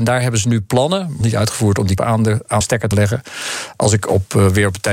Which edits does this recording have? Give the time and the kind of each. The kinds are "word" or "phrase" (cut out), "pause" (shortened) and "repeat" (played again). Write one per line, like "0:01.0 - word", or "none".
0:01.2 - word
0:02.0 - word
0:02.6 - word
0:02.9 - word